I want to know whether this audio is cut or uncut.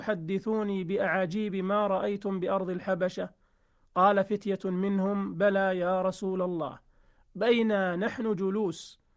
uncut